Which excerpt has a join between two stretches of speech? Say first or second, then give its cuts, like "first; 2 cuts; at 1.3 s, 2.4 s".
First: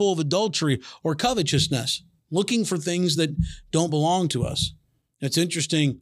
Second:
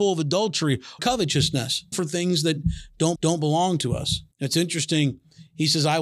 second; 4 cuts; at 1.0 s, 1.9 s, 3.2 s, 4.3 s